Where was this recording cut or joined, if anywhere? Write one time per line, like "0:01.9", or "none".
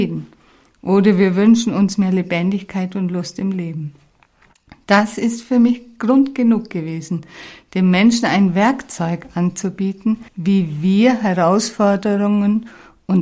0:10.3